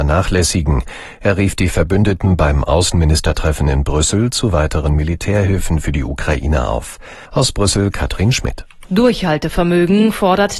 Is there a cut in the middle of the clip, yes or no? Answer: yes